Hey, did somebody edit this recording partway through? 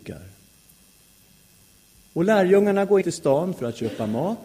yes; 1 cut; at 3.0 s

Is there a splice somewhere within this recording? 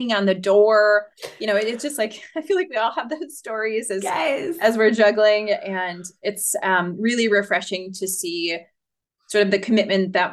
no; 0 cuts

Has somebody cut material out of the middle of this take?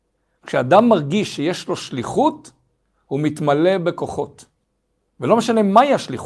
no; 0 cuts

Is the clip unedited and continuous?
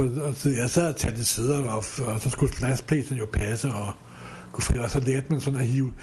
yes; 0 cuts

